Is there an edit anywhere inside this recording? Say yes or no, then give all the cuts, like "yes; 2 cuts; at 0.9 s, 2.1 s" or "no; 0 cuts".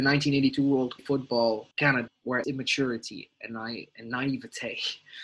yes; 4 cuts; at 1.0 s, 1.7 s, 2.1 s, 2.4 s